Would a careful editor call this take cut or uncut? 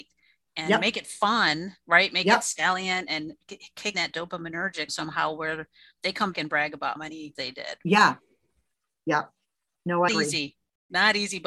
cut